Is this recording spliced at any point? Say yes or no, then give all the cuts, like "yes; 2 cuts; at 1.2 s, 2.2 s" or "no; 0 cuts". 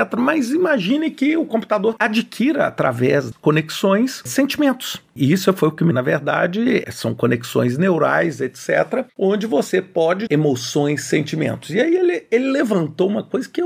yes; 5 cuts; at 2.0 s, 3.3 s, 5.9 s, 9.1 s, 10.3 s